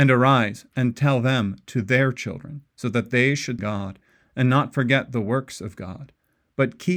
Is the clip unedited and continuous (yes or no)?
no